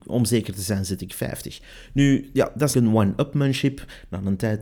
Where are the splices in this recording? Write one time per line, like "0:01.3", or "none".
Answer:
0:02.7